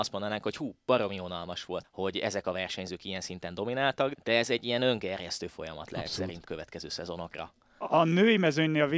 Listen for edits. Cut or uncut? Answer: cut